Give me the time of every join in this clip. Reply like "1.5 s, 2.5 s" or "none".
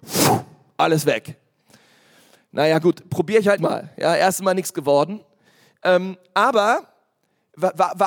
3.6 s